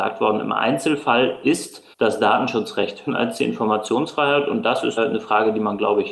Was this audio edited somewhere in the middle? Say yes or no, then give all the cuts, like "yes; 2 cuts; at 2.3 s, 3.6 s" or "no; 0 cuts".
yes; 3 cuts; at 1.9 s, 3.1 s, 5.0 s